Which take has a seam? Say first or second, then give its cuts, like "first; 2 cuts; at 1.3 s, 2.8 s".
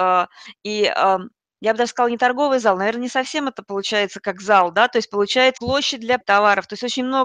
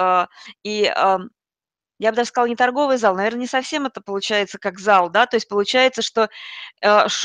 first; 3 cuts; at 1.4 s, 5.6 s, 6.2 s